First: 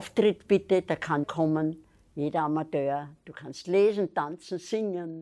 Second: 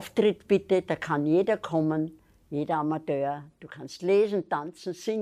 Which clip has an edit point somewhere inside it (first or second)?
first